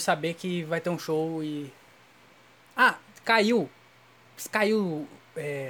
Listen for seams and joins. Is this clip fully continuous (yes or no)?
yes